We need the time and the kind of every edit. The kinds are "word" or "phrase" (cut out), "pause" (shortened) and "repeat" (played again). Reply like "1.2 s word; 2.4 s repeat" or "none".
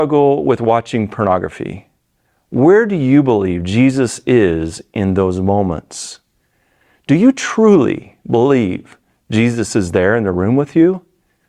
none